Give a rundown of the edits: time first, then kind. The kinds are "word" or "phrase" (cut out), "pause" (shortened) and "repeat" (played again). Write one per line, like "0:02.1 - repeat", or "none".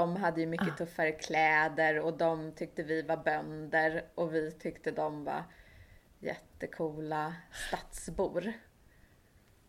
none